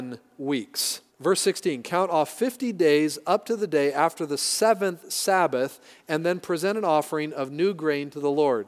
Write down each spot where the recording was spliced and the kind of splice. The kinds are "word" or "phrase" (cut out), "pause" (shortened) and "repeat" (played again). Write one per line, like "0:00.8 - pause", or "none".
0:01.1 - pause